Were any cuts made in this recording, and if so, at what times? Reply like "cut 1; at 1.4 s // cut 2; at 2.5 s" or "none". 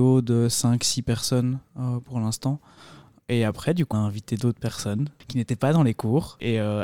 cut 1; at 3.9 s